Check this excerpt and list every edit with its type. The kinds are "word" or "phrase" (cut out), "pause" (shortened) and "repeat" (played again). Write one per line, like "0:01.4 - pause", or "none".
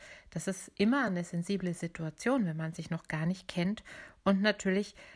none